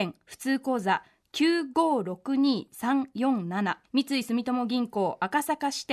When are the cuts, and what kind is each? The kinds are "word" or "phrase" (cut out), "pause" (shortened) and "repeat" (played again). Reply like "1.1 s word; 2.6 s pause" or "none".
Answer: 3.8 s pause